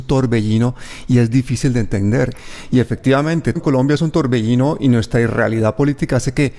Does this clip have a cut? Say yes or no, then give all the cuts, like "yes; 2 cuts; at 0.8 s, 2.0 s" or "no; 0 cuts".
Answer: yes; 1 cut; at 3.6 s